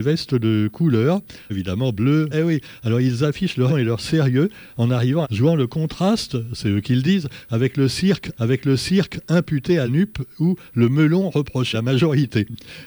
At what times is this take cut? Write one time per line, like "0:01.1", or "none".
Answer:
0:01.5
0:02.3
0:03.7
0:05.2
0:08.3
0:09.9
0:11.7